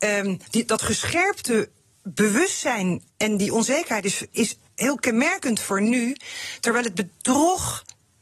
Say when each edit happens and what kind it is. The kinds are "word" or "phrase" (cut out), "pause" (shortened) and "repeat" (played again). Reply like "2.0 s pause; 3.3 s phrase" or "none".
3.1 s pause; 4.7 s word

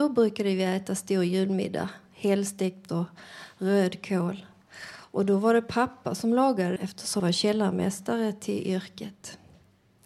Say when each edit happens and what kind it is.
2.9 s word; 6.8 s word; 7.2 s word

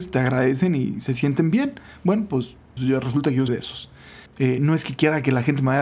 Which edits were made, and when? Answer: 2.8 s word; 3.5 s word; 4.3 s pause

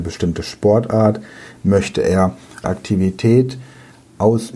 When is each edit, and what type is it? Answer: 2.6 s phrase

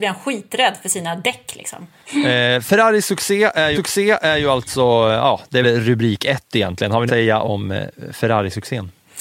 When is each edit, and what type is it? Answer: 3.8 s repeat; 5.6 s word; 7.1 s phrase

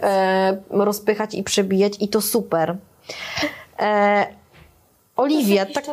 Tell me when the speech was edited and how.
none

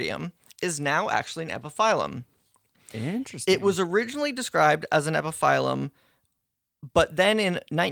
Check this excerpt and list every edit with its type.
none

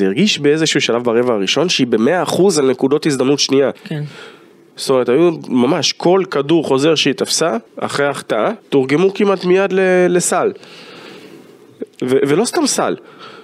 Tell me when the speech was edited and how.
3.8 s pause; 7.7 s pause; 8.6 s pause

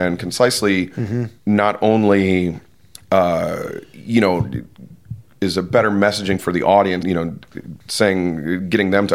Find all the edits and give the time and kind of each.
1.4 s pause; 2.9 s pause; 6.4 s word; 7.0 s word; 7.8 s pause

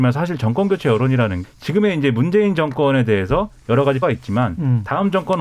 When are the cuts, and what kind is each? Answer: 1.4 s word; 4.0 s word

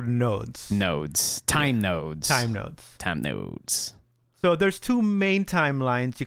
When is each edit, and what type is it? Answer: none

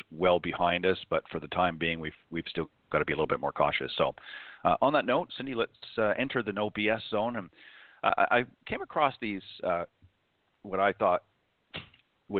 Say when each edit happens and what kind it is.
5.3 s word

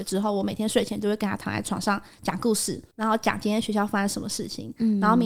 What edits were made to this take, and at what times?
2.9 s pause

